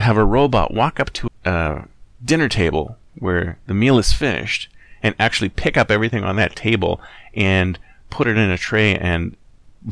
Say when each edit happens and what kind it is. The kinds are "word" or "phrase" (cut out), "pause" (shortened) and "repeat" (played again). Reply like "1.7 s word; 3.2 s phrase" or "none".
1.3 s word